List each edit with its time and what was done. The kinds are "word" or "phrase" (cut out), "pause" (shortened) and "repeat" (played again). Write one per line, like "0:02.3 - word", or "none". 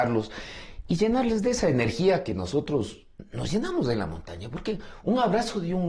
none